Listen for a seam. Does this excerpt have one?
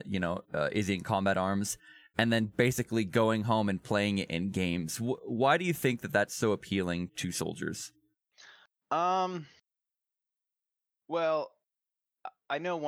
yes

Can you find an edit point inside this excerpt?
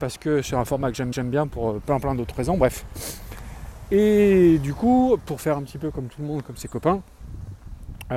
yes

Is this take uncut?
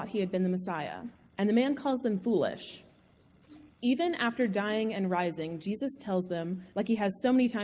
no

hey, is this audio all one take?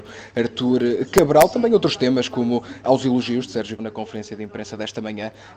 no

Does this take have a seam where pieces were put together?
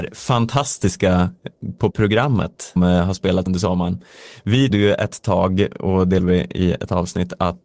yes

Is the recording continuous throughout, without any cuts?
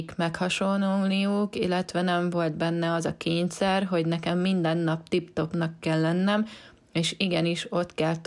yes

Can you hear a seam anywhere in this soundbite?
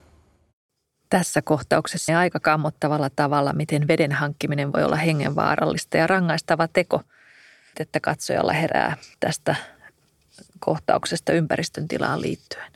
yes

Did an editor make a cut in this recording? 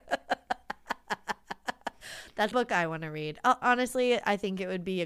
yes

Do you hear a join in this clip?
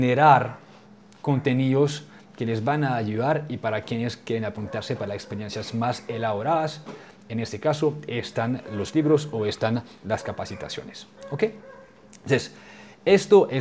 no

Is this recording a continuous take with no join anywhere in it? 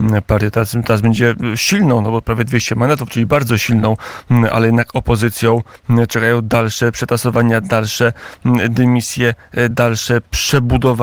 yes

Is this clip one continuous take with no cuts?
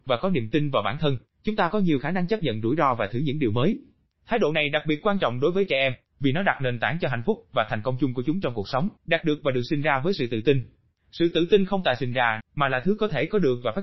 no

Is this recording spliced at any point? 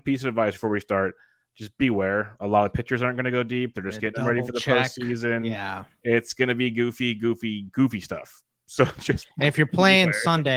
no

